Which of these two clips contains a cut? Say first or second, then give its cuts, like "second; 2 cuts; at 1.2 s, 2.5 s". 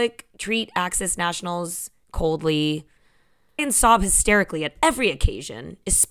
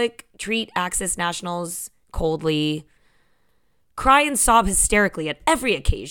first; 1 cut; at 3.6 s